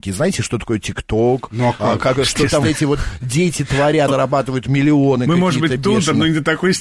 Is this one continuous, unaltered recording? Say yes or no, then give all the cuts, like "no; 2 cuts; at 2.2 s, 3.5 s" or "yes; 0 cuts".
no; 2 cuts; at 2.6 s, 4.1 s